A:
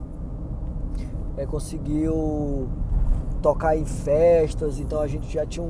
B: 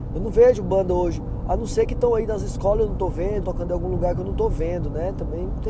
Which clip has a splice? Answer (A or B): B